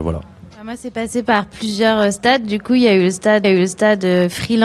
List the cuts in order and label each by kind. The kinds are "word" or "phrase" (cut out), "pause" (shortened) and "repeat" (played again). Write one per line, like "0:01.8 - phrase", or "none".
0:03.4 - repeat